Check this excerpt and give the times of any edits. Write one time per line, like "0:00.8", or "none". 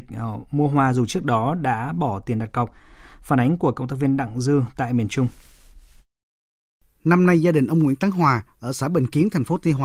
none